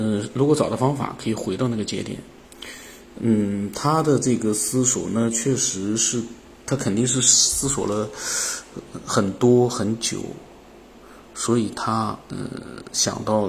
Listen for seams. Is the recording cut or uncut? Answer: uncut